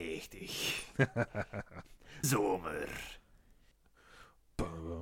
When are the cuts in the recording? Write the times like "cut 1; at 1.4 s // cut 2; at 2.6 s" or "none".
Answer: cut 1; at 2.2 s